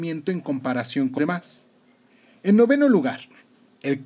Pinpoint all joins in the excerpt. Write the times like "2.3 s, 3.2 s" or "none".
1.2 s